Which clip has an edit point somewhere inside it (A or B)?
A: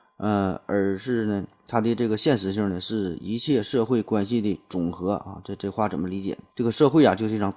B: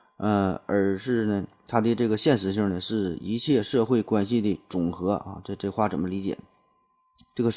A